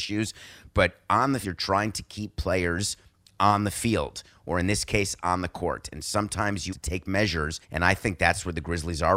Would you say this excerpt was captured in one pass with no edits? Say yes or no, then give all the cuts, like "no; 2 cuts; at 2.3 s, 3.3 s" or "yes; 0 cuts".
no; 3 cuts; at 1.4 s, 6.7 s, 7.6 s